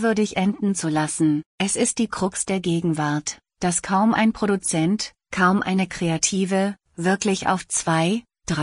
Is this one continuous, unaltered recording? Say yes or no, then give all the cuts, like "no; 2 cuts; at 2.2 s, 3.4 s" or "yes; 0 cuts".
no; 1 cut; at 1.5 s